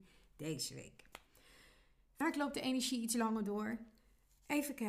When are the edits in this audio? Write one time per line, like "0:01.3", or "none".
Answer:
none